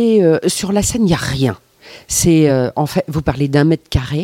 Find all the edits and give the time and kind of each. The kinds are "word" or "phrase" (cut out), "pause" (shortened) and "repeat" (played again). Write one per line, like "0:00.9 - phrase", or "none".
none